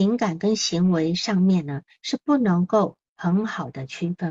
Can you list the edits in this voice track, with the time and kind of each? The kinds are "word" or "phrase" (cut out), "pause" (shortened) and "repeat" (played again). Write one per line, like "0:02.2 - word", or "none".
0:03.1 - pause